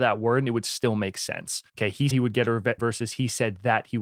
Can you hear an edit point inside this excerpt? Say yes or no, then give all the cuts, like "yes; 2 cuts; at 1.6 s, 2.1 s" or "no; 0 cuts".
yes; 3 cuts; at 1.7 s, 2.1 s, 2.8 s